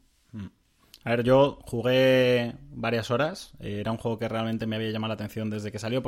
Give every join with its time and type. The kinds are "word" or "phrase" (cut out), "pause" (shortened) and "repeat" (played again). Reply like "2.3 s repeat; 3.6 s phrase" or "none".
none